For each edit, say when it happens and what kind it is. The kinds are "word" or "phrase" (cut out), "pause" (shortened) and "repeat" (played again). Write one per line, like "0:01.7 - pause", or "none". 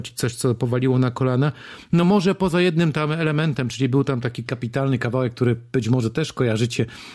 none